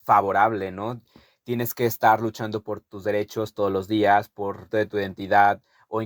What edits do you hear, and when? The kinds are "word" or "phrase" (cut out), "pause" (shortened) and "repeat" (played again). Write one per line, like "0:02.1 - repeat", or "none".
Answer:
0:04.7 - phrase